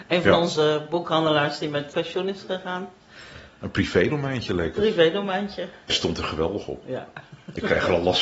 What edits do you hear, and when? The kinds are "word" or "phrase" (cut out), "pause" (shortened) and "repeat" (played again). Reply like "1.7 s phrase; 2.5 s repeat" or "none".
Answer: 1.9 s word; 5.9 s word